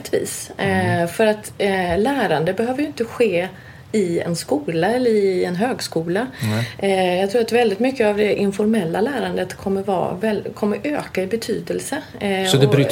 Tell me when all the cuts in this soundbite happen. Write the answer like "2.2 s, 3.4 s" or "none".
none